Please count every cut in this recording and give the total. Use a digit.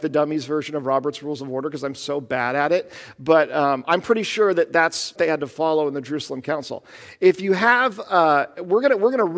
1